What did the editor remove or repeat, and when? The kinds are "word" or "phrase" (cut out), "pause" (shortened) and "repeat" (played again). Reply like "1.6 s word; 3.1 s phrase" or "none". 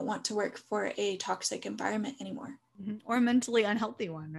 none